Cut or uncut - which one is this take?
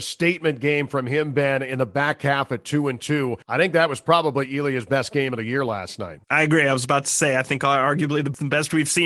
cut